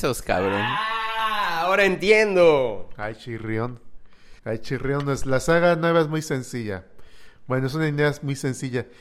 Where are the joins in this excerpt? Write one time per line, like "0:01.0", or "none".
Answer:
0:04.4